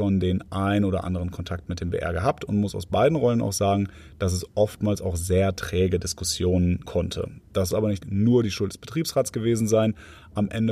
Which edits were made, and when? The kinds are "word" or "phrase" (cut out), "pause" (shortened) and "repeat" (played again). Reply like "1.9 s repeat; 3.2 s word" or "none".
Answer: 6.9 s word; 7.7 s word; 8.0 s word